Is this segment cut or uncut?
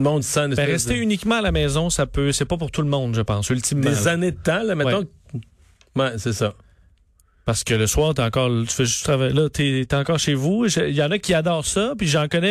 uncut